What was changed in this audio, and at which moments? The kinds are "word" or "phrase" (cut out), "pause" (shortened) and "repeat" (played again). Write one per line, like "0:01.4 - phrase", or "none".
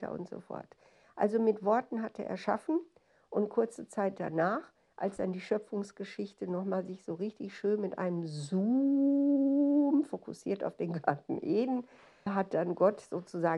0:12.3 - word